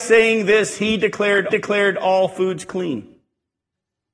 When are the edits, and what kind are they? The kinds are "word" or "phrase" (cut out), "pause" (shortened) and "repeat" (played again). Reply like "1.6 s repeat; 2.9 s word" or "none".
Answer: 1.5 s repeat